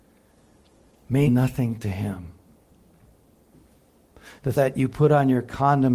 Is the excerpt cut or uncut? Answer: cut